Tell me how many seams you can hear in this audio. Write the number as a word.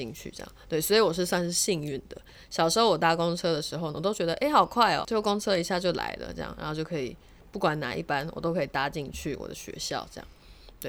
one